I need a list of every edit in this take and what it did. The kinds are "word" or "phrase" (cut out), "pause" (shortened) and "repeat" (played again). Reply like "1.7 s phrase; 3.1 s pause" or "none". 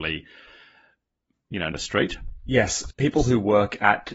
1.7 s word; 2.9 s word